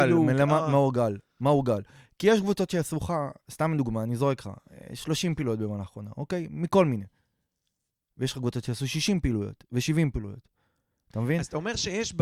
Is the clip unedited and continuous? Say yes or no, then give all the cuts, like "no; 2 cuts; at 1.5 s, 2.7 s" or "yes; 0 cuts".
yes; 0 cuts